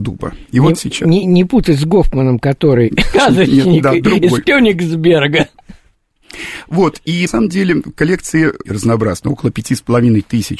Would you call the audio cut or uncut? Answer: cut